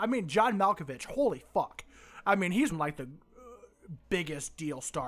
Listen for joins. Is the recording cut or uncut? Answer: cut